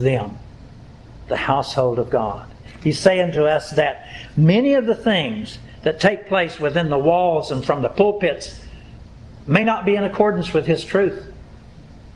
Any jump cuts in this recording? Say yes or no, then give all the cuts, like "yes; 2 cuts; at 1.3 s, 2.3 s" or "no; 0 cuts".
no; 0 cuts